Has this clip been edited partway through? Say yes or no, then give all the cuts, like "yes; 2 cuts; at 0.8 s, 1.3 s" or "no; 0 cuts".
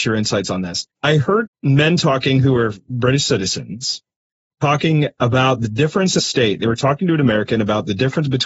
yes; 3 cuts; at 0.9 s, 1.5 s, 6.2 s